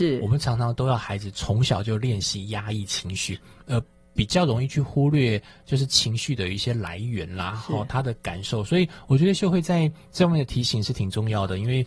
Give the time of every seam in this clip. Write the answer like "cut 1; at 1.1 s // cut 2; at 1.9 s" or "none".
none